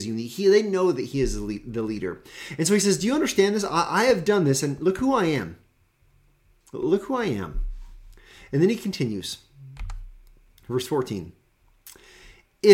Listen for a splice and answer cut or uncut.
uncut